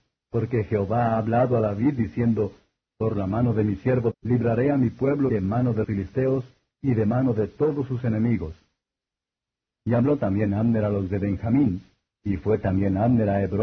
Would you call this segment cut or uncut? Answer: cut